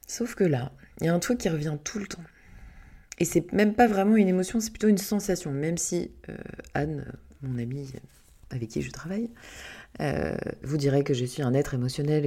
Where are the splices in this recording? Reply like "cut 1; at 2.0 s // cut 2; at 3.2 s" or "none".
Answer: none